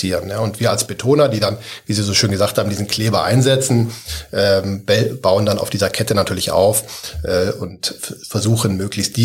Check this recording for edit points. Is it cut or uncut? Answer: uncut